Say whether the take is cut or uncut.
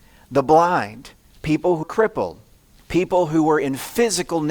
cut